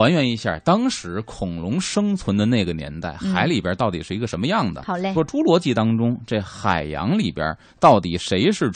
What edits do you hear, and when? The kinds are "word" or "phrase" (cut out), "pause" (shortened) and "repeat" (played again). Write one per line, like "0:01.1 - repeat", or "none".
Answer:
0:05.1 - word